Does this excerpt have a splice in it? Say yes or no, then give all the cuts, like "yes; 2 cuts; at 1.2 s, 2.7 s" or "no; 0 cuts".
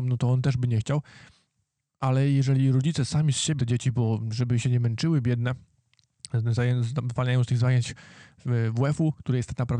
yes; 1 cut; at 3.6 s